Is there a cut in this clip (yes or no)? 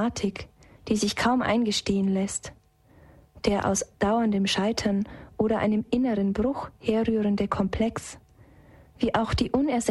no